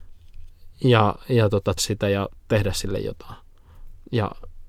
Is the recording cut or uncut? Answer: cut